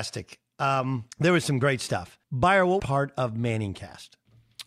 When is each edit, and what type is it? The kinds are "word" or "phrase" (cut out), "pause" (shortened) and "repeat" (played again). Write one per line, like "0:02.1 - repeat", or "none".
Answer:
0:01.1 - pause
0:02.2 - pause
0:02.8 - phrase